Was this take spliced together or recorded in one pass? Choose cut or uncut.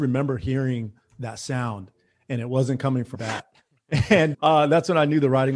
cut